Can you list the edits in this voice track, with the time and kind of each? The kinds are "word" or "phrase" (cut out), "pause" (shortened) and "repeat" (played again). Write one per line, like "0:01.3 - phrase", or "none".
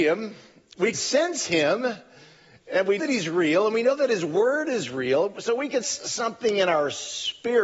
0:00.9 - word
0:03.0 - word
0:05.8 - word

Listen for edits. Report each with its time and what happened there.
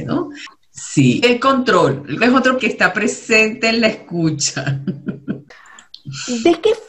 0:01.2 - word
0:02.2 - word
0:02.6 - word

